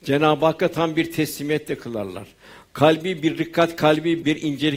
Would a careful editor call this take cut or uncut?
uncut